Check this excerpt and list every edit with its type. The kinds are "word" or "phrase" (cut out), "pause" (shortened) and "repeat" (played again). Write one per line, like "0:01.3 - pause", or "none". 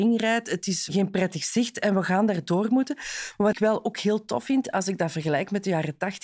0:03.5 - phrase

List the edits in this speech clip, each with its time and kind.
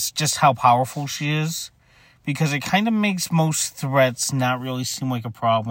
none

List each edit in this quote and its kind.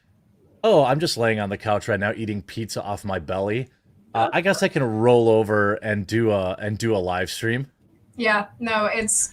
none

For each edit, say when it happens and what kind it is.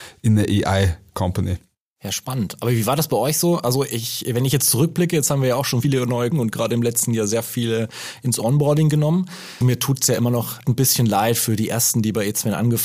0:05.8 - word
0:06.3 - word
0:09.6 - word
0:10.6 - word

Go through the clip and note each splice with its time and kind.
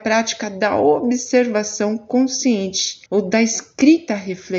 0:03.1 - pause

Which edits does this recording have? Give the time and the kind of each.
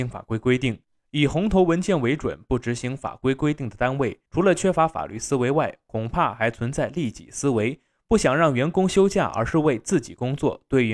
0:04.3 - pause

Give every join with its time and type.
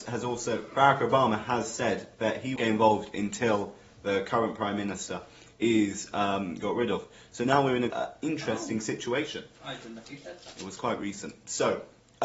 0:02.6 - phrase
0:05.5 - pause
0:07.9 - word

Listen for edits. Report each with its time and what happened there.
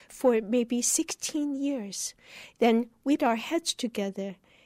0:03.2 - word

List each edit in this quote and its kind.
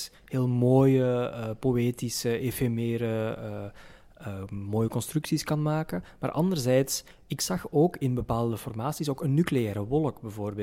none

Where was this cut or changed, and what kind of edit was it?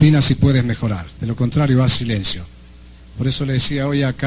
0:01.1 - pause

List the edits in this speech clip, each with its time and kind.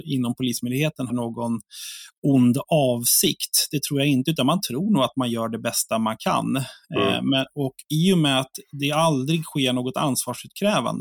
0:01.1 - word
0:07.8 - pause

